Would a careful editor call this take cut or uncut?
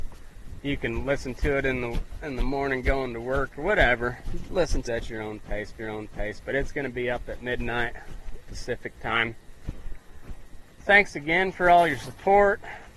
cut